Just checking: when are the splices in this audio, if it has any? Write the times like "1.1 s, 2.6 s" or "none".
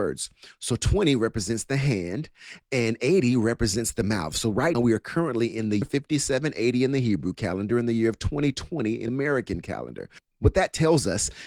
4.7 s, 5.8 s, 9.1 s